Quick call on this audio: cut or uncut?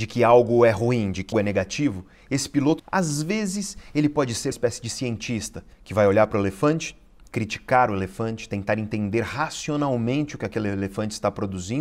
cut